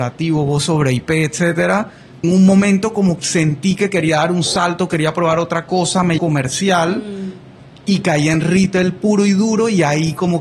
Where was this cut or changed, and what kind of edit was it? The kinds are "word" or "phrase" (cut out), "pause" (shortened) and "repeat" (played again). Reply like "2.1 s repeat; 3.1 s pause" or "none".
2.2 s phrase; 3.2 s word; 6.2 s phrase